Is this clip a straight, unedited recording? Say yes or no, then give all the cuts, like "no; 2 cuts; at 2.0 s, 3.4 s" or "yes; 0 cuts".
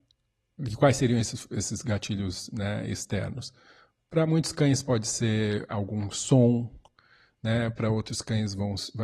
yes; 0 cuts